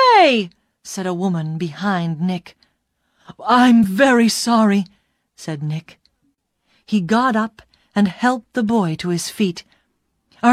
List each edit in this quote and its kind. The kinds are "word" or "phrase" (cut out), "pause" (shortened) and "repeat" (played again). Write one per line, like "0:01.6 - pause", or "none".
none